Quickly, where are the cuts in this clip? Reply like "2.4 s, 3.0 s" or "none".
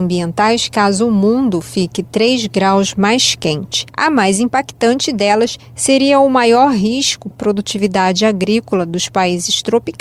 7.3 s